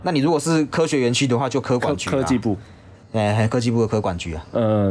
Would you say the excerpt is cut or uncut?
cut